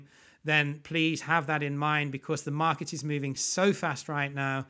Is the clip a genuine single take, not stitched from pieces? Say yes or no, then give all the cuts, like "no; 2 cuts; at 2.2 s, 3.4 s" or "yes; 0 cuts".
yes; 0 cuts